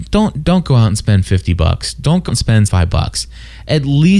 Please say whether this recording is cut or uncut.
cut